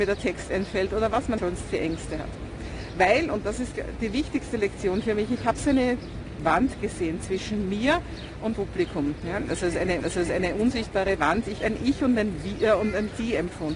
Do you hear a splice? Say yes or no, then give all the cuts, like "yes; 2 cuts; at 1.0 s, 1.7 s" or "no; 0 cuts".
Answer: yes; 4 cuts; at 1.4 s, 8.5 s, 10.0 s, 11.6 s